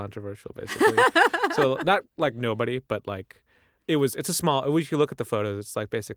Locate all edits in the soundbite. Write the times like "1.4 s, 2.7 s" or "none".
none